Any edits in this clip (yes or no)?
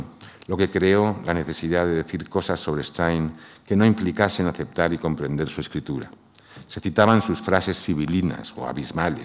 no